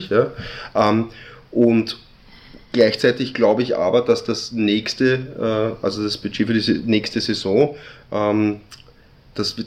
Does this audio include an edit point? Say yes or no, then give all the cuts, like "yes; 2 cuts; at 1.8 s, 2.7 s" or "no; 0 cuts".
yes; 1 cut; at 2.6 s